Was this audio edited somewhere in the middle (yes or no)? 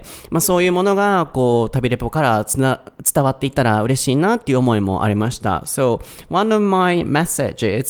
no